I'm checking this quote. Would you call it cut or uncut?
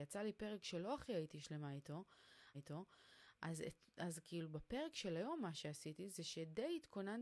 cut